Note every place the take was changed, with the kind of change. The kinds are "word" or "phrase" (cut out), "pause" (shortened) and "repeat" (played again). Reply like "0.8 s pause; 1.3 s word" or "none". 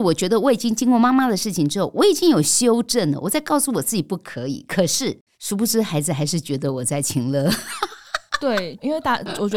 5.3 s pause